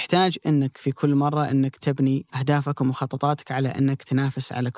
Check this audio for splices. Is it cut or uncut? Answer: cut